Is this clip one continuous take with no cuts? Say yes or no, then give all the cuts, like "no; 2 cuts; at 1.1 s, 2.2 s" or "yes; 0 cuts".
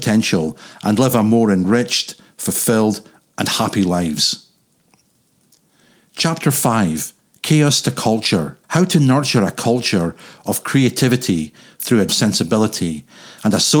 no; 3 cuts; at 7.2 s, 8.6 s, 12.1 s